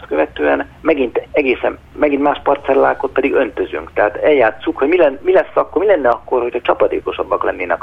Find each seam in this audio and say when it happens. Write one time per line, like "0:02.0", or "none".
0:01.9